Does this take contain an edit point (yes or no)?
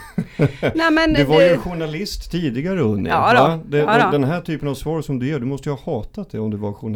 no